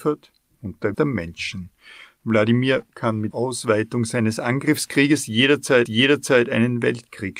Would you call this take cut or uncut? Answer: cut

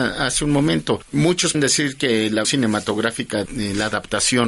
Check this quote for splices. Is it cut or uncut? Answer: cut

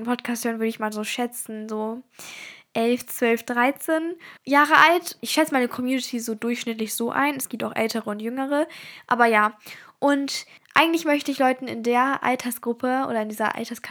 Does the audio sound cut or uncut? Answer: cut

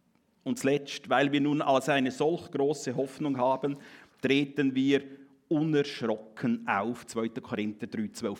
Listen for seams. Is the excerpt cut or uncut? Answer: uncut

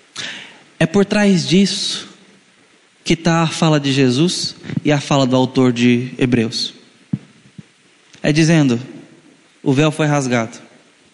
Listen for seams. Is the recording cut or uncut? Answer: uncut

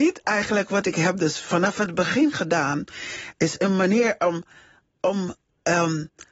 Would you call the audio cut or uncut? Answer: uncut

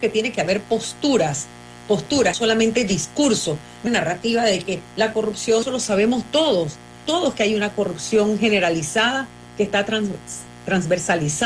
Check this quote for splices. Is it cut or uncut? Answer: cut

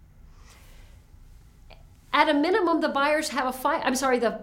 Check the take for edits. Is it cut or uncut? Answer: uncut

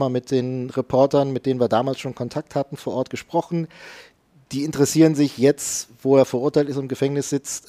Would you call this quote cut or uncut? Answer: uncut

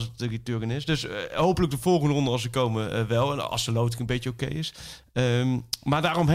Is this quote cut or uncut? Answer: uncut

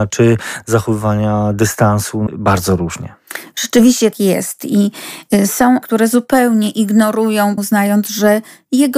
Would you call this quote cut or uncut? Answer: cut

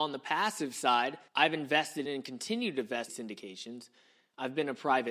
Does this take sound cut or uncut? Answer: cut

